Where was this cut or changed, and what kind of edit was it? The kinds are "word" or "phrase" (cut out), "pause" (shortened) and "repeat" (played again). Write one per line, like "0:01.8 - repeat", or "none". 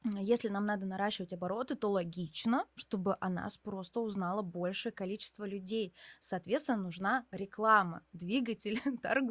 none